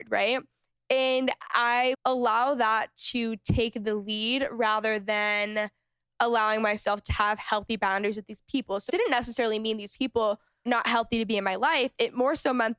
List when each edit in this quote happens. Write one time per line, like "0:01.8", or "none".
0:01.9
0:07.1
0:08.9
0:10.7